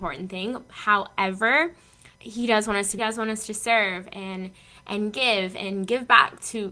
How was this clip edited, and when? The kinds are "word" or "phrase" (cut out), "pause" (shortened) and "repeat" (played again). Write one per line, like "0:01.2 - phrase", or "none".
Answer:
0:02.2 - pause
0:03.0 - phrase

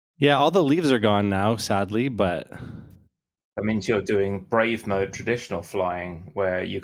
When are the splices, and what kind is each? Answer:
none

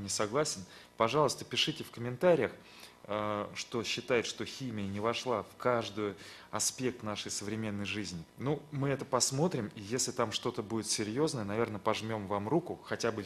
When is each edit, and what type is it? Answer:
0:08.3 - pause

